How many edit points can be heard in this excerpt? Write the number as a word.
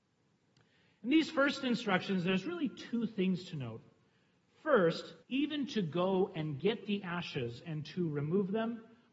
one